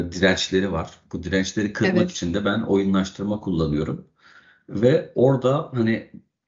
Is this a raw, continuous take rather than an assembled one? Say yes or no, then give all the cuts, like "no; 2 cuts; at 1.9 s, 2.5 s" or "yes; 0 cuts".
yes; 0 cuts